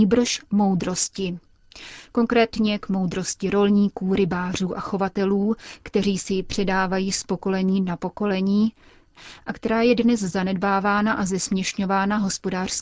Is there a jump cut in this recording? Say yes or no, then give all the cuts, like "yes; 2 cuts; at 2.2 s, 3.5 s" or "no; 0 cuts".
no; 0 cuts